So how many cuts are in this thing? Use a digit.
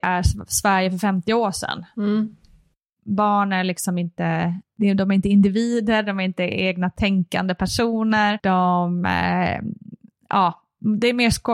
0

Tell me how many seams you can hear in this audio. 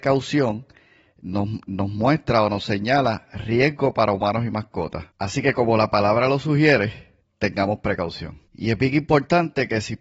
3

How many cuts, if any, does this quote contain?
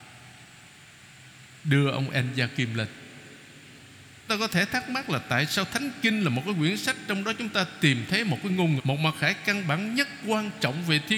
2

